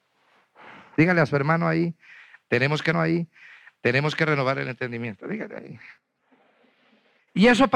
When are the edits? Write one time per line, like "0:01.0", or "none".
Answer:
0:02.9